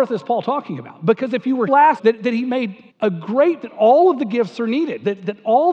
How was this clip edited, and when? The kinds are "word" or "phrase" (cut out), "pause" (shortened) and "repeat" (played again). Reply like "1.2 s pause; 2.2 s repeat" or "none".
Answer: 1.7 s word; 2.0 s phrase; 2.9 s pause; 3.6 s word